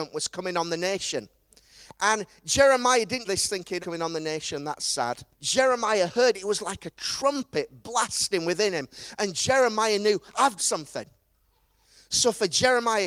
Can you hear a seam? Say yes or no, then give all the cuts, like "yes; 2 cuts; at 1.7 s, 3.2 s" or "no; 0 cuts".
yes; 4 cuts; at 3.2 s, 3.8 s, 5.3 s, 10.6 s